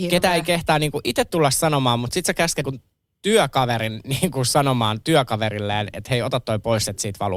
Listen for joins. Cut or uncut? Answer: cut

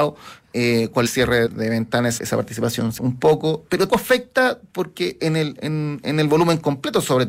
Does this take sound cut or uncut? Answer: cut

